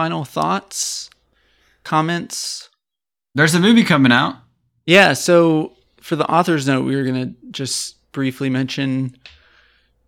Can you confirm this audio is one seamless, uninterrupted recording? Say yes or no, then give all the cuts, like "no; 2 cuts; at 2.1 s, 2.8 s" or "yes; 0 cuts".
yes; 0 cuts